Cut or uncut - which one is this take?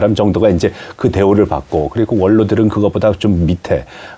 uncut